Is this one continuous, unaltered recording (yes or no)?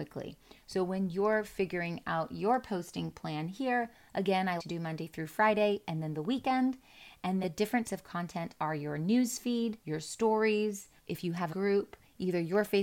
no